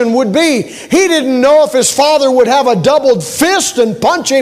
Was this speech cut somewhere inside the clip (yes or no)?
no